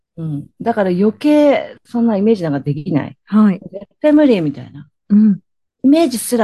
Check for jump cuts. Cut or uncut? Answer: cut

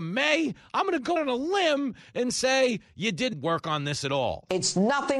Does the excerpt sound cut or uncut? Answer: cut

